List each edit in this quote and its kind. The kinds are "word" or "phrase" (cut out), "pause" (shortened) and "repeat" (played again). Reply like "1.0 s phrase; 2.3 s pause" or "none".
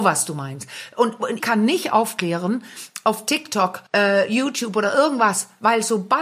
1.4 s word; 3.9 s pause